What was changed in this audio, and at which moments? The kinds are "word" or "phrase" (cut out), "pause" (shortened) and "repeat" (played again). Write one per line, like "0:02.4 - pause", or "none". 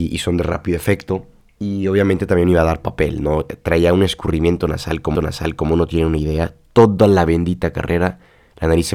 0:01.4 - pause
0:05.2 - repeat

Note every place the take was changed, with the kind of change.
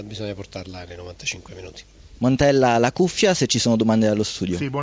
none

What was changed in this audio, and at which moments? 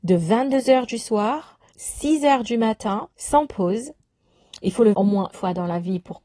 0:01.7 - word
0:03.1 - pause
0:04.9 - word
0:05.3 - word

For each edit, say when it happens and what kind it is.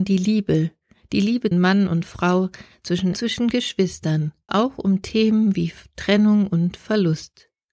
0:01.5 - word
0:03.1 - phrase
0:04.5 - word

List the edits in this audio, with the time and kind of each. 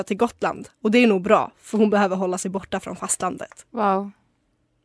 0:03.7 - pause

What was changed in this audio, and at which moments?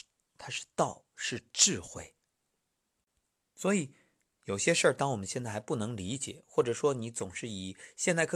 none

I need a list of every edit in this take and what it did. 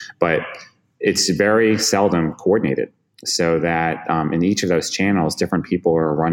none

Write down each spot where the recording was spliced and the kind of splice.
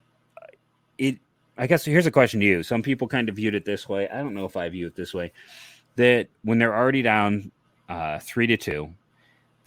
none

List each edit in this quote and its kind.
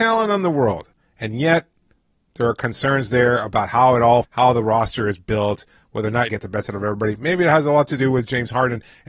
0:04.2 - word
0:06.3 - phrase

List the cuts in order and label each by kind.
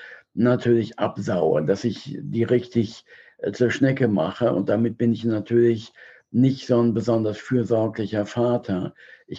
none

